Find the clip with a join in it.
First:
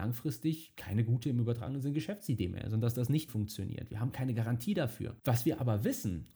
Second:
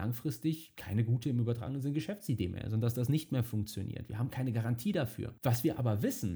first; 1 cut; at 3.3 s

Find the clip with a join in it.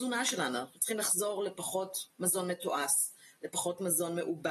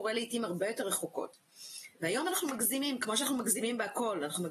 second; 1 cut; at 1.9 s

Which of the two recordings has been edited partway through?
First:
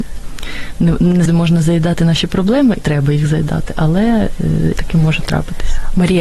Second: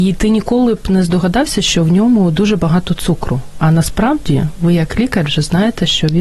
first; 3 cuts; at 1.3 s, 2.8 s, 4.8 s

